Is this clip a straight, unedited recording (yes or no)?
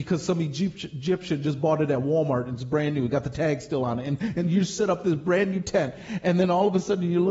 yes